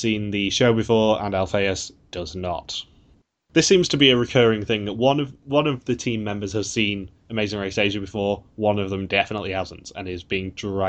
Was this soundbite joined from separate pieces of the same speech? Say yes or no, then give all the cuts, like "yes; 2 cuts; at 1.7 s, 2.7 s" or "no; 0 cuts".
no; 0 cuts